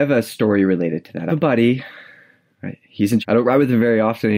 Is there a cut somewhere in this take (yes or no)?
yes